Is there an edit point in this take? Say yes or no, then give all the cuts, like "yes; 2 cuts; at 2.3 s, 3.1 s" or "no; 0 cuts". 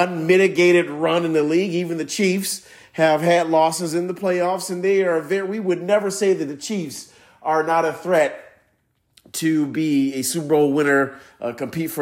no; 0 cuts